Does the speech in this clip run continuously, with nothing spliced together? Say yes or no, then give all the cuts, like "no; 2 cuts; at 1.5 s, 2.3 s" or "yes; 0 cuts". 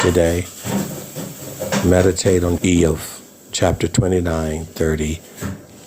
no; 2 cuts; at 2.6 s, 4.7 s